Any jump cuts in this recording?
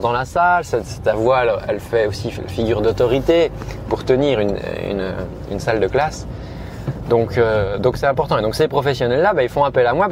no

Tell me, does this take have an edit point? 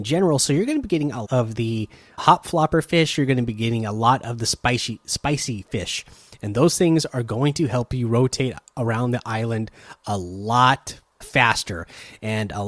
yes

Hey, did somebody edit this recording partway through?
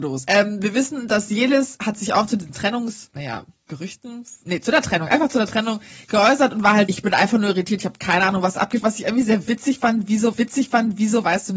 yes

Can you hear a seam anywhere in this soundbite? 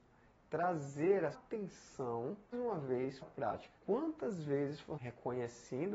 yes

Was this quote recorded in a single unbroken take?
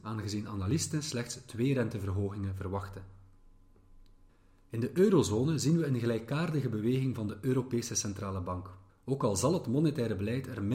no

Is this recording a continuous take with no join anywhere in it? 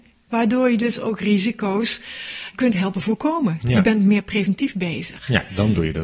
no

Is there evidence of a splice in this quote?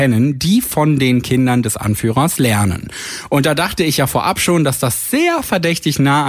no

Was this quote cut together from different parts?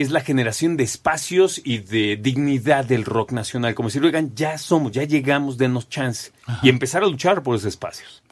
no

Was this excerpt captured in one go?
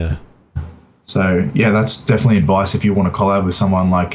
yes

